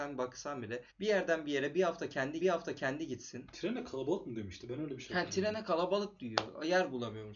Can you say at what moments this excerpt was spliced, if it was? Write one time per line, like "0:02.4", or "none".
0:00.9
0:02.4